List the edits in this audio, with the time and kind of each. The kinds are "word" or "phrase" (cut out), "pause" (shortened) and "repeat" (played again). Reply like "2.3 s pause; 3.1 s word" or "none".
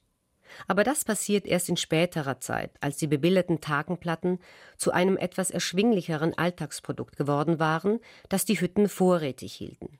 none